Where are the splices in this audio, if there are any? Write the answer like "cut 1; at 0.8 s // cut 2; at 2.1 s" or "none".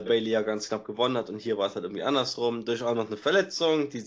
none